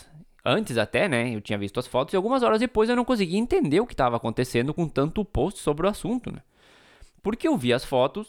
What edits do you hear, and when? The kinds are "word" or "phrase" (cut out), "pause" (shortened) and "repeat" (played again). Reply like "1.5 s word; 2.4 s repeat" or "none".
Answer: none